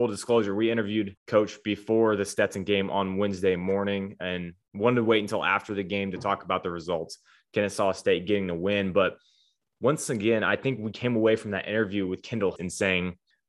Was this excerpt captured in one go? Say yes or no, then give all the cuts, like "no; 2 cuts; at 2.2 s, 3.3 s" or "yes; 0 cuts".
no; 2 cuts; at 1.2 s, 12.6 s